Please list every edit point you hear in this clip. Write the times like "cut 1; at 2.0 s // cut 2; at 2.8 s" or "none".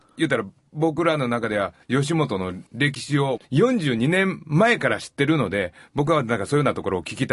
cut 1; at 1.8 s // cut 2; at 2.7 s // cut 3; at 3.4 s